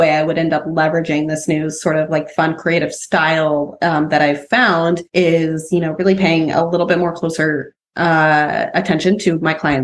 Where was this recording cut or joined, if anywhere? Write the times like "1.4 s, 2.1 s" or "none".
5.1 s